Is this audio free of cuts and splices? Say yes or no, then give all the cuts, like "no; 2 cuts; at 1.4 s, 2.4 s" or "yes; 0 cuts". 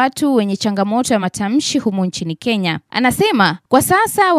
yes; 0 cuts